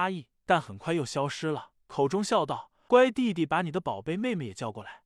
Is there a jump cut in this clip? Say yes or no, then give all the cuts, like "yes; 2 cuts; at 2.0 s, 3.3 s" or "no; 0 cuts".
no; 0 cuts